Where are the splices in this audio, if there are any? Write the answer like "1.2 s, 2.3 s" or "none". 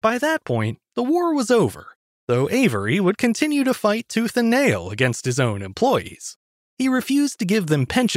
none

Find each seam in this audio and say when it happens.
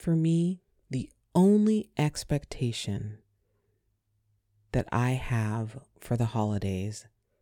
none

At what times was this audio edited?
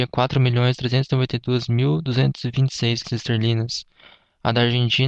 3.0 s

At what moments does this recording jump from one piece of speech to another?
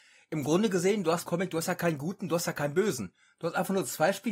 1.3 s

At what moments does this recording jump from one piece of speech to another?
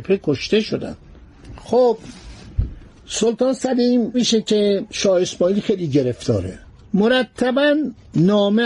4.1 s

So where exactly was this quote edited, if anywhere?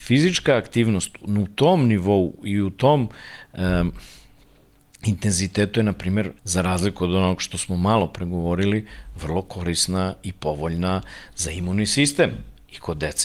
6.4 s

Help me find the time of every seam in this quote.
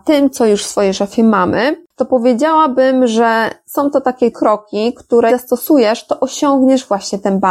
1.9 s, 4.3 s, 5.3 s

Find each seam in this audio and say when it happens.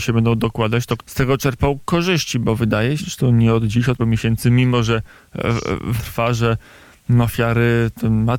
1.0 s, 3.0 s, 4.0 s, 6.0 s

